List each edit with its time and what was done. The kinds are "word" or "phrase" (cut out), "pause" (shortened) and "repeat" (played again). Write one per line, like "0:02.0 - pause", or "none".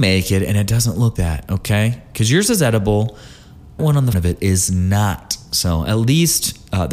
0:01.2 - word
0:03.8 - word
0:04.1 - word